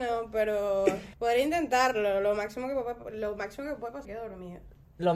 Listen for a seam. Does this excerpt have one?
yes; 2 cuts; at 1.1 s, 4.0 s

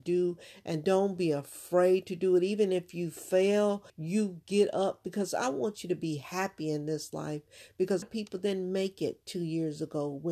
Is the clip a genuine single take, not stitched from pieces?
no; 2 cuts; at 3.9 s, 8.0 s

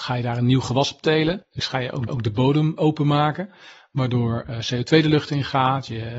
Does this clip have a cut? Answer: yes; 3 cuts; at 1.6 s, 2.1 s, 2.8 s

